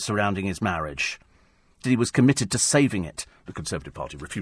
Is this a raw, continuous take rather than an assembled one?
no; 1 cut; at 1.8 s

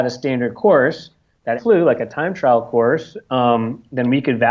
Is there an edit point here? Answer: yes; 1 cut; at 1.6 s

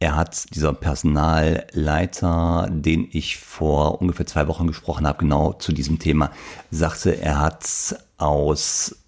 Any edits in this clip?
no; 0 cuts

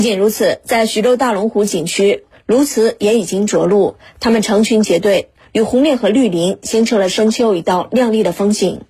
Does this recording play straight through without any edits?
yes; 0 cuts

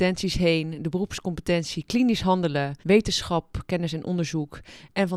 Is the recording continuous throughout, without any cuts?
no; 1 cut; at 2.8 s

